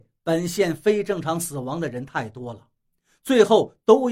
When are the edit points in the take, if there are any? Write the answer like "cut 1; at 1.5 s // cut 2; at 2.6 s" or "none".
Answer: none